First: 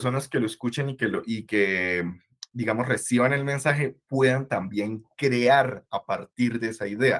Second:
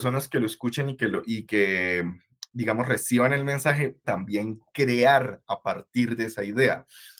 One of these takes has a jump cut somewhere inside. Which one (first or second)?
second